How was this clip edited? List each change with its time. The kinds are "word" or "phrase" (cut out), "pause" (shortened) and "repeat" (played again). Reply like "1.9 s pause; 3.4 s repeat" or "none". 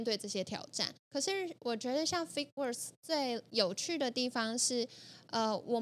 1.0 s pause